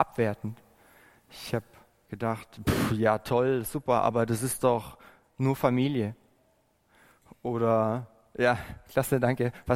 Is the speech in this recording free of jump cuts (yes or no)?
yes